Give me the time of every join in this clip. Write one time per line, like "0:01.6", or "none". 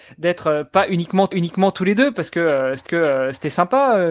0:01.3
0:02.9